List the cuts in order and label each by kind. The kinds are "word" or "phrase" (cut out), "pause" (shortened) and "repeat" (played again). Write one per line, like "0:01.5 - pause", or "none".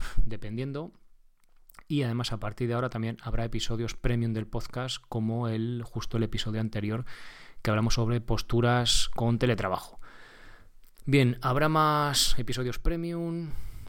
none